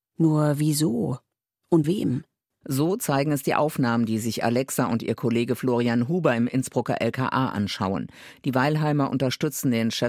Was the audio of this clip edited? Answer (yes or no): yes